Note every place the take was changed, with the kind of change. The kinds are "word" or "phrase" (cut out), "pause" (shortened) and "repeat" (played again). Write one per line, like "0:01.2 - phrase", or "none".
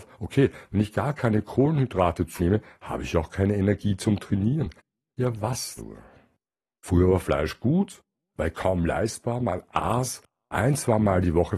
0:02.4 - word
0:05.8 - word

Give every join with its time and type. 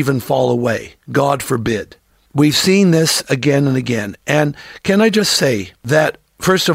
none

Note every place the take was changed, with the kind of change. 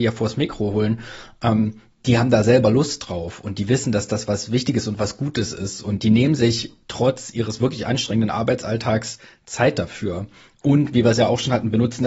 none

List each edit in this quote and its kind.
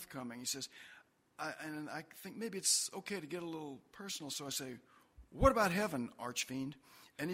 none

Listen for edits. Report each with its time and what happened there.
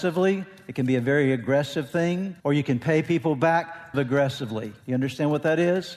0:02.4 - pause
0:03.9 - word
0:04.8 - pause

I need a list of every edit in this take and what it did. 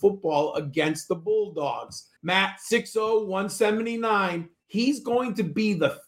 0:02.2 - pause
0:04.5 - pause

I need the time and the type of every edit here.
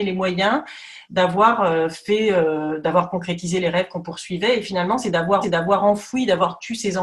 0:05.4 - repeat

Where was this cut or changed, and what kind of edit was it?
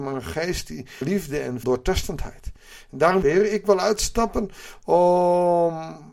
0:01.0 - word
0:01.6 - word
0:03.2 - phrase

